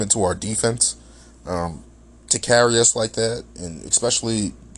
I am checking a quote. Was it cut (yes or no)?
no